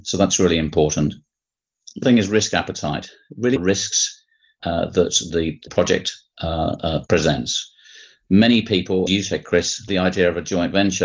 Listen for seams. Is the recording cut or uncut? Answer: cut